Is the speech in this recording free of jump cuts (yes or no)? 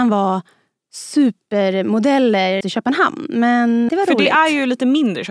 no